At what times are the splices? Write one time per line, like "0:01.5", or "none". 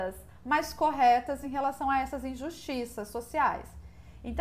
none